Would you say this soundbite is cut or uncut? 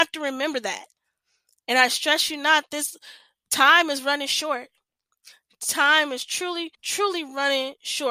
cut